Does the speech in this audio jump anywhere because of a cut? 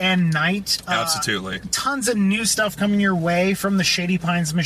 no; 0 cuts

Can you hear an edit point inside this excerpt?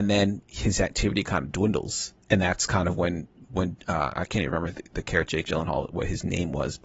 yes; 2 cuts; at 2.2 s, 5.3 s

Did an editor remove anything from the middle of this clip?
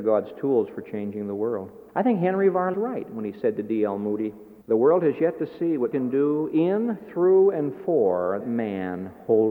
yes; 5 cuts; at 1.9 s, 2.7 s, 4.6 s, 5.9 s, 8.4 s

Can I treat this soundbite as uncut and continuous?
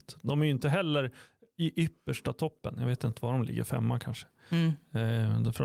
yes; 0 cuts

